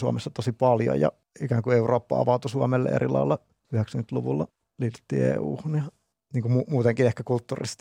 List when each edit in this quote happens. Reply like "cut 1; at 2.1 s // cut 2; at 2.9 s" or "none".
none

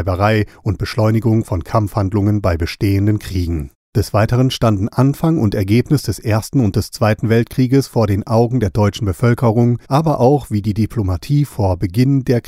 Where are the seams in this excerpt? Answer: cut 1; at 3.8 s // cut 2; at 9.8 s

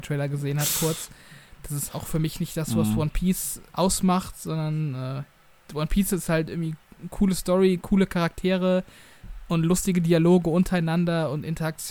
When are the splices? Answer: cut 1; at 1.9 s // cut 2; at 3.7 s

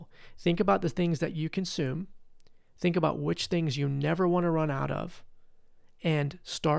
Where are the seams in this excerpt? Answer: none

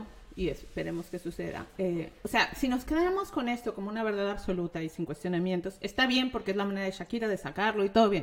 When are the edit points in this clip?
none

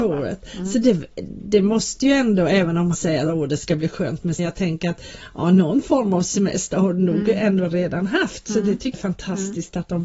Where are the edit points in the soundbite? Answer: cut 1; at 2.9 s // cut 2; at 4.4 s // cut 3; at 8.9 s

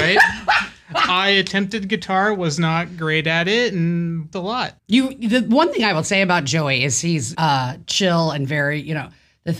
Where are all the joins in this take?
cut 1; at 4.3 s // cut 2; at 4.8 s // cut 3; at 7.3 s

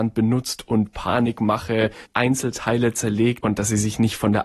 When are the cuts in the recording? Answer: cut 1; at 2.1 s // cut 2; at 3.4 s

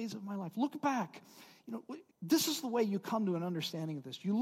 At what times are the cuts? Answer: cut 1; at 2.1 s

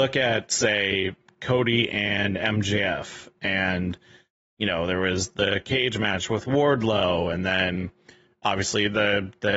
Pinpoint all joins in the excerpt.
none

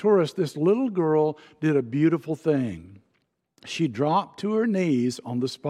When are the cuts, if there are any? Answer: none

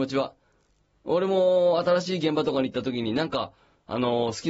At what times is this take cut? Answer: none

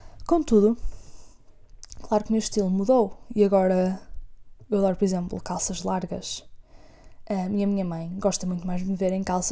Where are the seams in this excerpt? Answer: none

